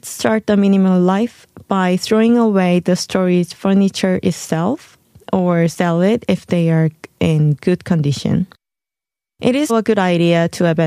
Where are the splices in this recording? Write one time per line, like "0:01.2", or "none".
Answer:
0:09.7